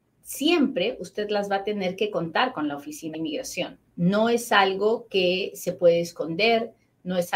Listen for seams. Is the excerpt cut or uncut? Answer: cut